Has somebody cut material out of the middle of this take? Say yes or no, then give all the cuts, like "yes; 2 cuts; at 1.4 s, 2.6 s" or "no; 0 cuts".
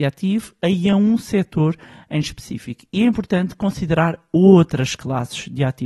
no; 0 cuts